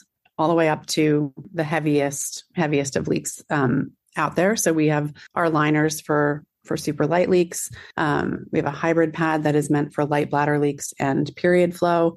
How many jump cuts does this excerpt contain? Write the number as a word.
two